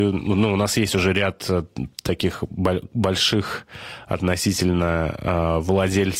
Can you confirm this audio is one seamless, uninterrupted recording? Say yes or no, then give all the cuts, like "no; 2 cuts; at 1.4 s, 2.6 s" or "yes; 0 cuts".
no; 1 cut; at 1.9 s